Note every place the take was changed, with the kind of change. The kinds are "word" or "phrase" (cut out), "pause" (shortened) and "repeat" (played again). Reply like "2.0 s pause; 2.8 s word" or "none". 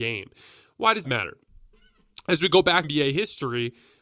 1.0 s word; 2.8 s word